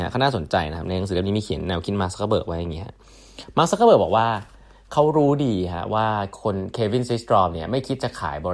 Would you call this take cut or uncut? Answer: uncut